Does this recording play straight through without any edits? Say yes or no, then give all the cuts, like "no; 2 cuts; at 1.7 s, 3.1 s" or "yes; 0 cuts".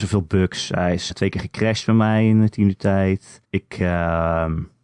no; 2 cuts; at 1.1 s, 3.4 s